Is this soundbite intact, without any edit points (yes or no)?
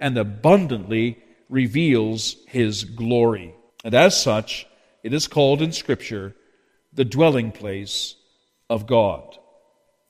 no